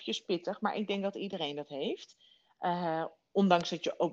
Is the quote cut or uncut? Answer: uncut